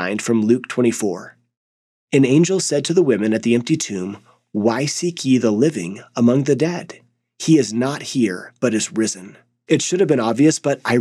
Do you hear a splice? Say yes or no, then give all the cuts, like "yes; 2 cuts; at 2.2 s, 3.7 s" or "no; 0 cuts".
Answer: no; 0 cuts